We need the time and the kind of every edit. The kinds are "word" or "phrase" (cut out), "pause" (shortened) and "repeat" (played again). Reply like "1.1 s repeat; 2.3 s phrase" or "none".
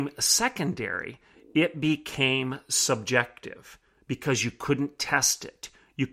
none

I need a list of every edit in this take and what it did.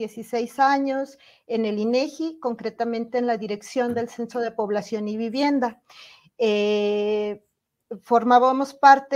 none

